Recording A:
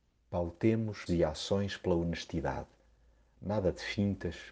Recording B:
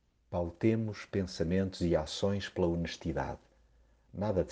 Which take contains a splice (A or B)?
A